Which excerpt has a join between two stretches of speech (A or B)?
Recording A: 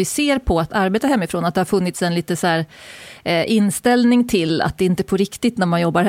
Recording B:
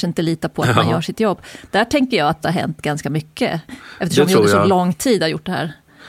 B